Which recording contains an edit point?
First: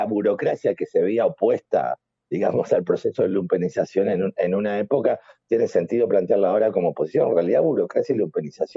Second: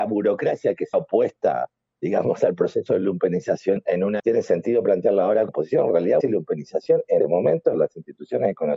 second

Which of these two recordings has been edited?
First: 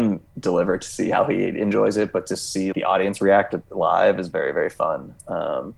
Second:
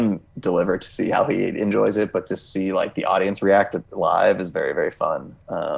first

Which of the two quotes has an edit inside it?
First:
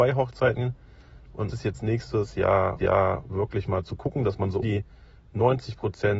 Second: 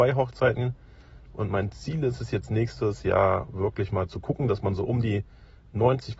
first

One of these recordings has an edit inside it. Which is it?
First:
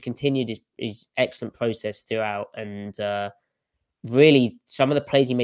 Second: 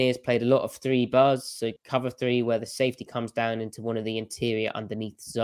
second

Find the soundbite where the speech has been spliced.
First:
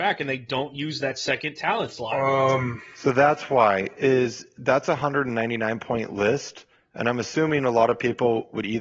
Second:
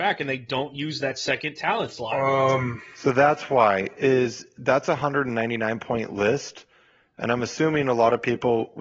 first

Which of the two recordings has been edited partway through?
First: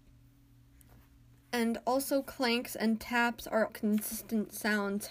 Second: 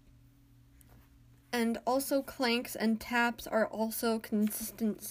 first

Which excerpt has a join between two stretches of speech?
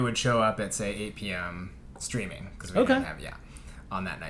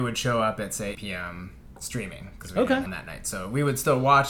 second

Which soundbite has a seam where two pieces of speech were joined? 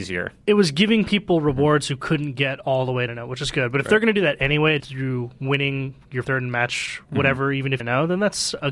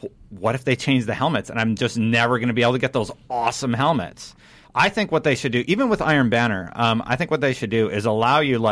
first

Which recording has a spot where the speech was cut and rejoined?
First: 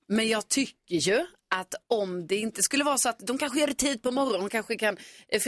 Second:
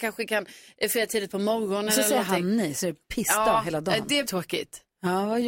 second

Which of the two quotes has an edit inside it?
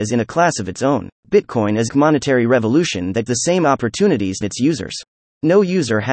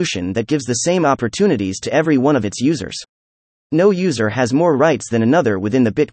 first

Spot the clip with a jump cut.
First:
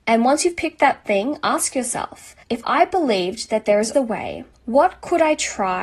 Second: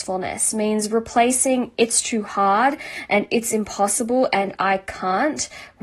first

